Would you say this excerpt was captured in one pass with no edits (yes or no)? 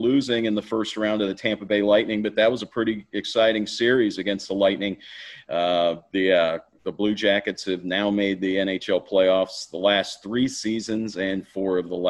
yes